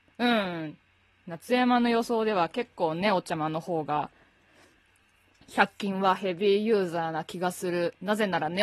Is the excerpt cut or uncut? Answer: uncut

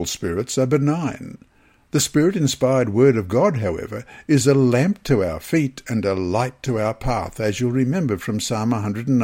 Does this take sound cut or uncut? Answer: uncut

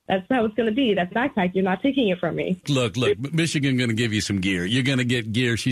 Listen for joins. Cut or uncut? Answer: cut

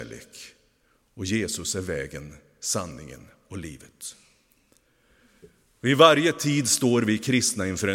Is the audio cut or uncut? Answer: uncut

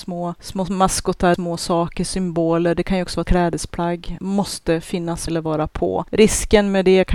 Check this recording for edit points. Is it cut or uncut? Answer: cut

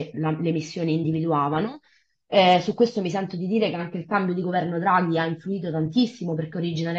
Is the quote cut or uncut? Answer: uncut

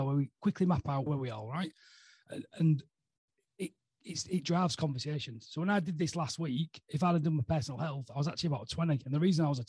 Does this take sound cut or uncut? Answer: uncut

